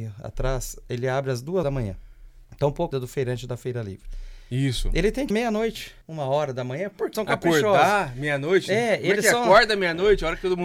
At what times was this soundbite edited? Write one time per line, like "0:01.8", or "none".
0:01.6
0:02.4
0:02.9
0:05.3
0:06.0
0:07.1